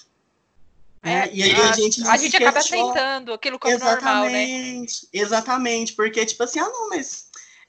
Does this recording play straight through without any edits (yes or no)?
yes